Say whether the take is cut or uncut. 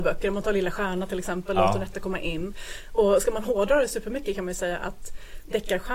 uncut